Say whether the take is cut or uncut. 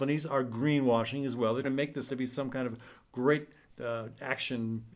cut